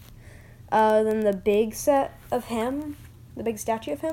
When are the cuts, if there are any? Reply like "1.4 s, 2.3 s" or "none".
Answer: none